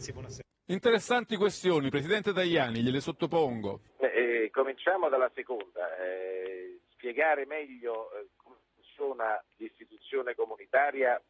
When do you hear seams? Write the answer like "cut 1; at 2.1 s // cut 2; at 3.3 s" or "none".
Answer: cut 1; at 3.9 s // cut 2; at 6.8 s // cut 3; at 9.5 s